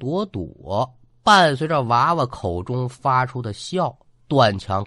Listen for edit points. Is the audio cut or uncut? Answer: uncut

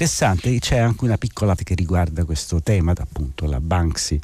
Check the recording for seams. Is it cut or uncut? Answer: cut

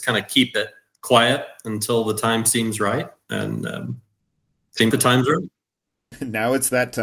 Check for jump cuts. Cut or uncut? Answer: cut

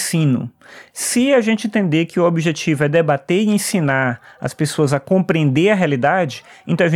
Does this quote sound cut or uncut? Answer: uncut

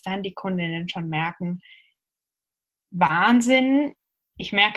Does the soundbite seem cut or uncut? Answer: uncut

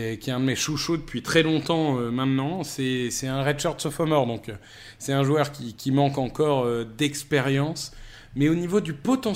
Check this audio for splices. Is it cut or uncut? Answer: uncut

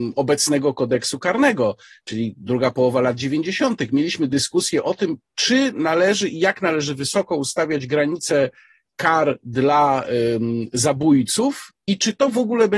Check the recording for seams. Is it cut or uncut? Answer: uncut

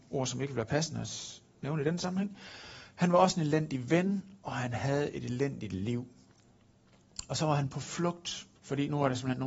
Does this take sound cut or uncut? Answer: cut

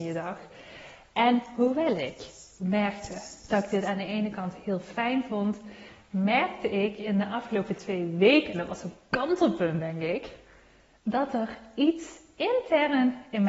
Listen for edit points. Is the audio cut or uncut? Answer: uncut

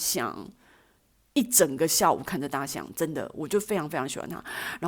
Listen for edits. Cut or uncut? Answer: uncut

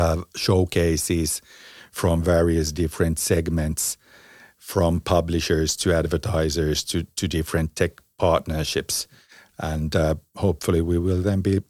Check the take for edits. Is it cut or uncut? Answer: uncut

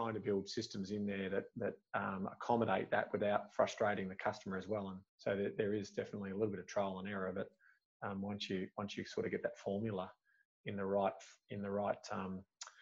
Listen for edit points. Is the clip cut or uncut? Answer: cut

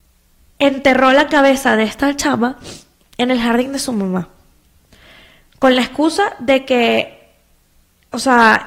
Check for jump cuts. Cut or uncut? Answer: uncut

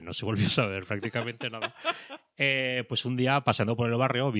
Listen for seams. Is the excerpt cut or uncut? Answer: uncut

